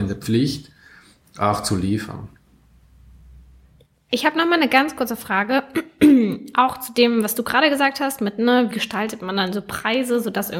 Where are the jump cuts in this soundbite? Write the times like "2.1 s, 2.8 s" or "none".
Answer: 8.7 s